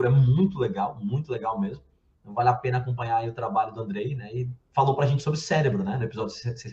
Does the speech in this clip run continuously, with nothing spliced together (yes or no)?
yes